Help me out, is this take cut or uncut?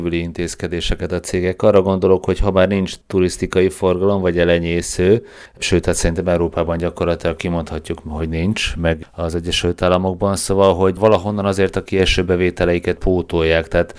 uncut